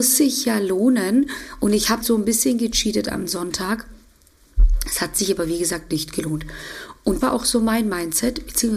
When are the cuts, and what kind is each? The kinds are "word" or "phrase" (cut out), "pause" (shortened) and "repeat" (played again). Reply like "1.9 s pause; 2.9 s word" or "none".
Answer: 2.0 s word; 7.2 s word

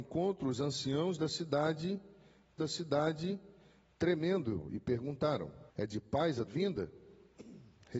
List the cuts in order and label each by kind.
2.6 s repeat; 5.7 s pause; 6.5 s word

